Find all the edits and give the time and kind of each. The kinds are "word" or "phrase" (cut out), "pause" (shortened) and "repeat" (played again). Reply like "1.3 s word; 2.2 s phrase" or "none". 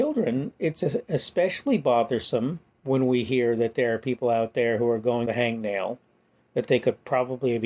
2.7 s pause; 5.3 s phrase

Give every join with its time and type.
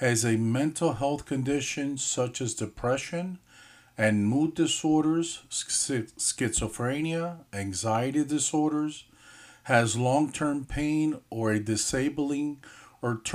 none

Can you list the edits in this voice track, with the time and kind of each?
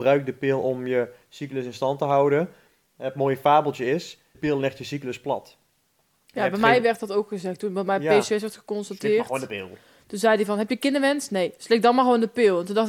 4.3 s word

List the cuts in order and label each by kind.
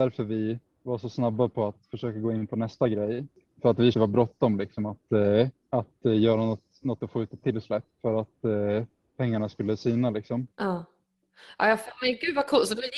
3.9 s phrase; 7.0 s word; 7.9 s pause; 10.5 s pause

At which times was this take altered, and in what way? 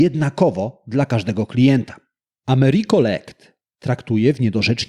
none

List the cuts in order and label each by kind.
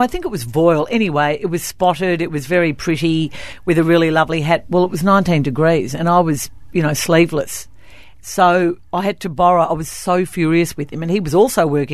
none

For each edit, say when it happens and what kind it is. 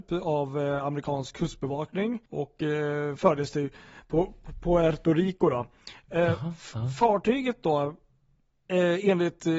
2.3 s pause

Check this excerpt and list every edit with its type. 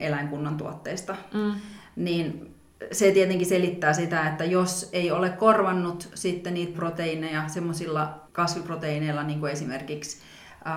6.7 s phrase; 8.3 s pause

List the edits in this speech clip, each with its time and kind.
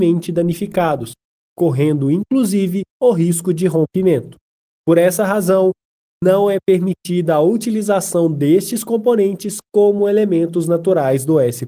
2.9 s pause

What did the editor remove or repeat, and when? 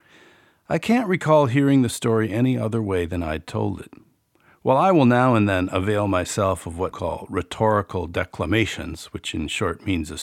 6.9 s word

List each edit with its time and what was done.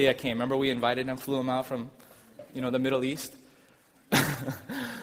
none

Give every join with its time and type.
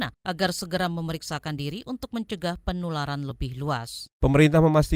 none

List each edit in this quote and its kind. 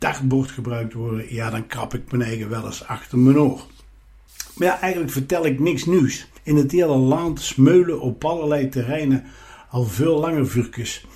6.4 s pause

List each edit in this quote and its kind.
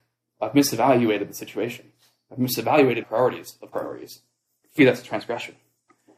3.0 s word; 3.7 s word; 4.8 s word

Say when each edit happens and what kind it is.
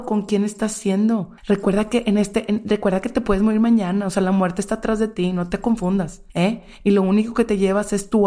1.4 s pause; 6.3 s pause

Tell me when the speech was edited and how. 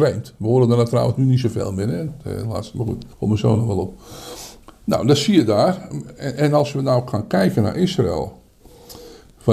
3.1 s pause; 4.6 s pause

